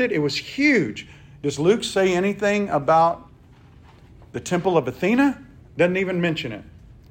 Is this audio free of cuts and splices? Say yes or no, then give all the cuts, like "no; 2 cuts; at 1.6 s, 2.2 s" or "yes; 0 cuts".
yes; 0 cuts